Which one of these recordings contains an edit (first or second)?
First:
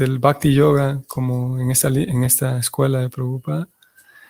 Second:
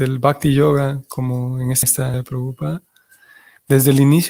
second